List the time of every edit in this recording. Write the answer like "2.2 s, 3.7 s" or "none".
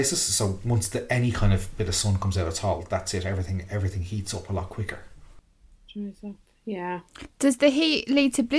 none

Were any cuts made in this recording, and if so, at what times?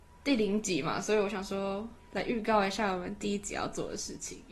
2.0 s

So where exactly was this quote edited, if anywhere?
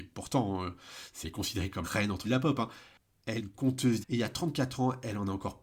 1.2 s, 1.8 s, 2.2 s, 3.4 s, 4.0 s

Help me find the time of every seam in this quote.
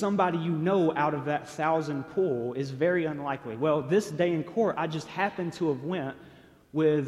none

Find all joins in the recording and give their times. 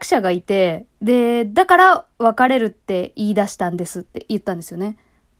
0.9 s

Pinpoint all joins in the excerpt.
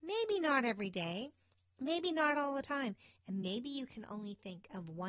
none

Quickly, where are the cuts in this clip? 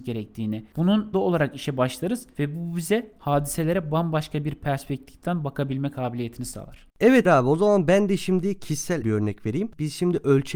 1.1 s, 7.3 s, 9.0 s

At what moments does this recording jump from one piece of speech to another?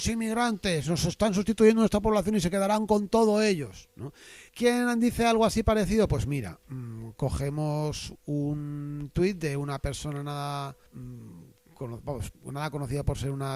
4.5 s, 10.9 s

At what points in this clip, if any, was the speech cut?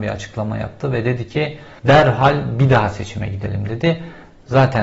1.8 s

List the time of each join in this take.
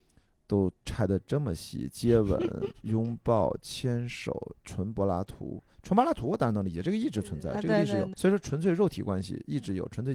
4.6 s, 8.1 s

